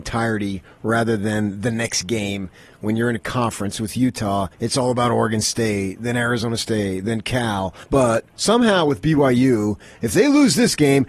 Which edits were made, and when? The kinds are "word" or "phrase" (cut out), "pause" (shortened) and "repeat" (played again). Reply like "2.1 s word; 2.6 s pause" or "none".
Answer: 4.5 s pause; 7.8 s pause